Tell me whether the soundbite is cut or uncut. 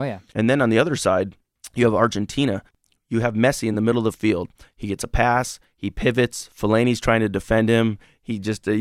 uncut